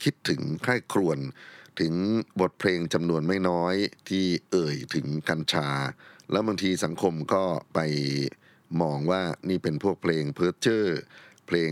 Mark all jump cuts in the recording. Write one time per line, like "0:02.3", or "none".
0:02.3
0:04.0